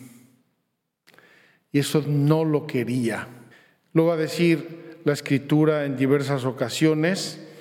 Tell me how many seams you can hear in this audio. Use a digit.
2